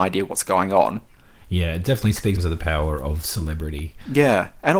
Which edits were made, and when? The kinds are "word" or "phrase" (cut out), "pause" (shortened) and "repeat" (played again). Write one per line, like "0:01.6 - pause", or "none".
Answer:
0:02.4 - word